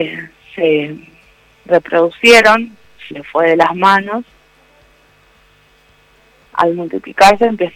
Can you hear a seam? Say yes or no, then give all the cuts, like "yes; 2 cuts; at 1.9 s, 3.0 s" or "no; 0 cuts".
yes; 2 cuts; at 3.1 s, 6.5 s